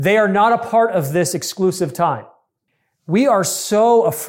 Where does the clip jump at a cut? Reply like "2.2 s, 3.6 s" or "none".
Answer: none